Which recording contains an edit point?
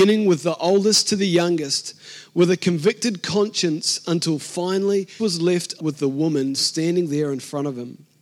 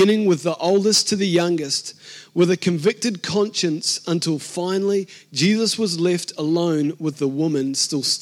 first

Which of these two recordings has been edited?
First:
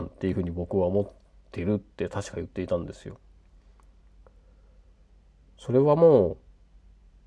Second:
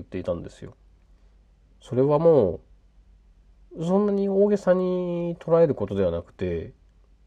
second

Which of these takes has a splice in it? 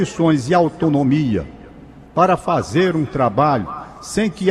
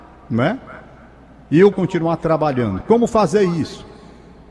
second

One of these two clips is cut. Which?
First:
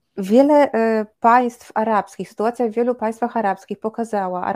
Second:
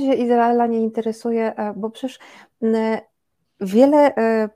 first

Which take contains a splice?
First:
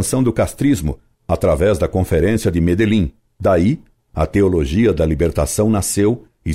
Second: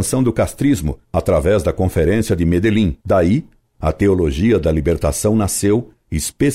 second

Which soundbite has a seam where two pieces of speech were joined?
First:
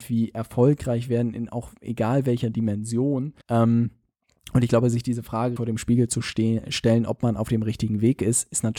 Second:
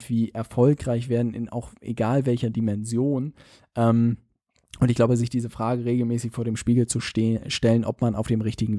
first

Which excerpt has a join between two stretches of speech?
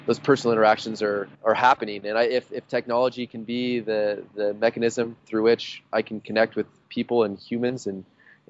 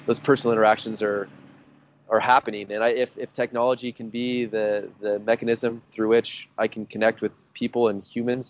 first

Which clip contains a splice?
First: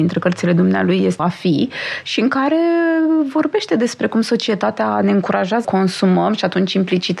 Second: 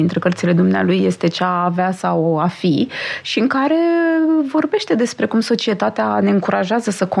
first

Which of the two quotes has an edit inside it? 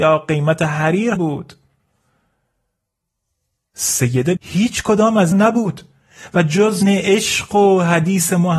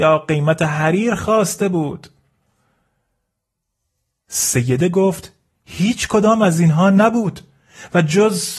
first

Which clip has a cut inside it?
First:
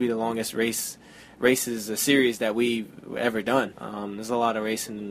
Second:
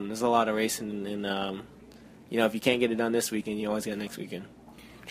first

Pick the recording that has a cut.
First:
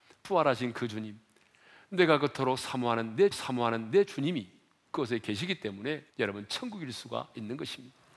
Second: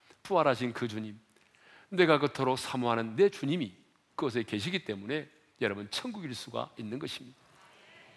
first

